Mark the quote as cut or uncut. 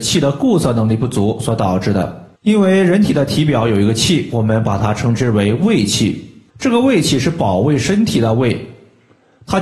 cut